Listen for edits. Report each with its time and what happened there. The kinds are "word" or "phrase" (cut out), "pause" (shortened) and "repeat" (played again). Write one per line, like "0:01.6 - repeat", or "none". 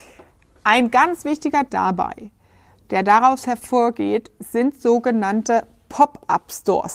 0:01.7 - word